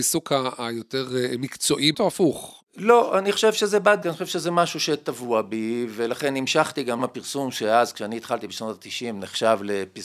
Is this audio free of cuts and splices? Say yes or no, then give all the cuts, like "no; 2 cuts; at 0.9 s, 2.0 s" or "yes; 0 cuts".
no; 3 cuts; at 1.9 s, 4.0 s, 7.0 s